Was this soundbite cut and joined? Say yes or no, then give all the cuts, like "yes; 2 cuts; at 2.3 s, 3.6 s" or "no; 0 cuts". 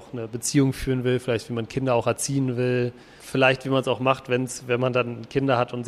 yes; 1 cut; at 3.2 s